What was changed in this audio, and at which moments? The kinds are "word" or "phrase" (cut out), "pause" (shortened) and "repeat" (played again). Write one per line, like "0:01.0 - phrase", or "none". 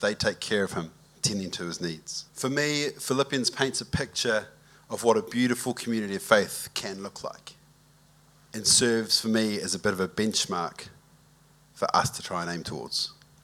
0:02.3 - pause
0:07.9 - pause